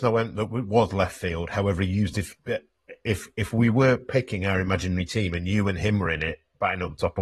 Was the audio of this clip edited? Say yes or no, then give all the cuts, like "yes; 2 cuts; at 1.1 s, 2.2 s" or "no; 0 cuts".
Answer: no; 0 cuts